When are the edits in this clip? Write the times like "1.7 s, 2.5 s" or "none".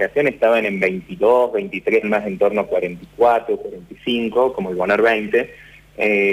2.0 s, 4.5 s

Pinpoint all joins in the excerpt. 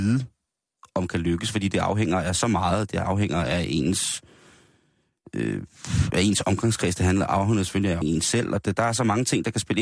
8.0 s

